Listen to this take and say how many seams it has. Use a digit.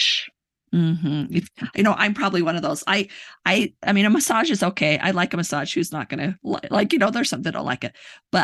0